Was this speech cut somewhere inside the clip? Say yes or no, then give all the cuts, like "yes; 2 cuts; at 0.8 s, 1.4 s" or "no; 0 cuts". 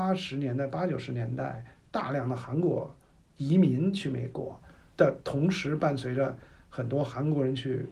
no; 0 cuts